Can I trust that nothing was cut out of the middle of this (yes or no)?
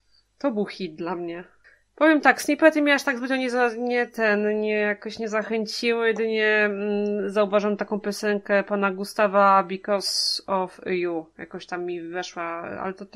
no